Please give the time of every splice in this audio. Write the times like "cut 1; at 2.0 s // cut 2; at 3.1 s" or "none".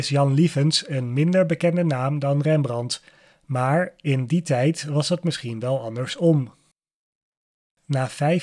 none